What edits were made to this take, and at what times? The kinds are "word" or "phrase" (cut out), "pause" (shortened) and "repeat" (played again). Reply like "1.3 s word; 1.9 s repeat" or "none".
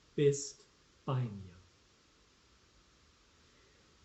none